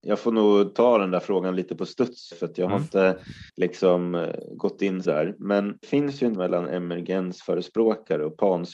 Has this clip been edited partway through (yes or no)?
yes